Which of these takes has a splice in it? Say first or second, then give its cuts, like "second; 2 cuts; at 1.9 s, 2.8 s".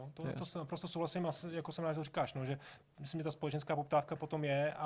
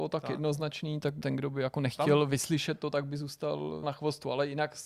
second; 2 cuts; at 1.2 s, 3.8 s